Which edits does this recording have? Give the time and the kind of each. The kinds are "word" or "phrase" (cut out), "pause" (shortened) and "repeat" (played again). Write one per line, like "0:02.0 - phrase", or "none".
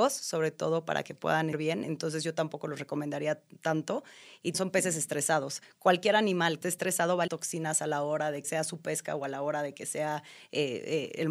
0:01.5 - word
0:04.5 - word
0:06.6 - word
0:07.3 - word
0:08.4 - word